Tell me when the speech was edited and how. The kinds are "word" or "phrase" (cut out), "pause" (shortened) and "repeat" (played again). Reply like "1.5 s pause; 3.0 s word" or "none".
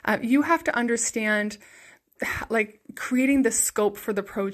none